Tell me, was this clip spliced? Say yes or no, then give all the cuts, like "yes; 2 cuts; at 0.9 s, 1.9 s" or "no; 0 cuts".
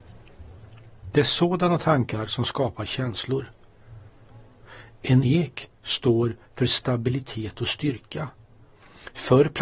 no; 0 cuts